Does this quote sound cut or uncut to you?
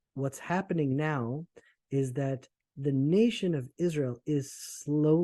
uncut